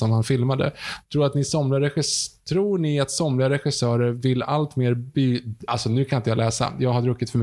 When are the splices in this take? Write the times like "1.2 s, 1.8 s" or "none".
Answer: 5.7 s